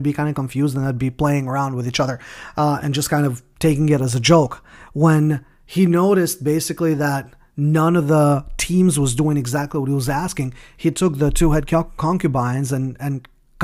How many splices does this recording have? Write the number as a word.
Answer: zero